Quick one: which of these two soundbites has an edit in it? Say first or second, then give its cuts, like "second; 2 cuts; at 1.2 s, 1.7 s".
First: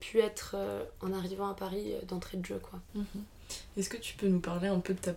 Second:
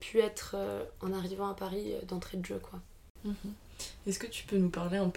first; 1 cut; at 2.9 s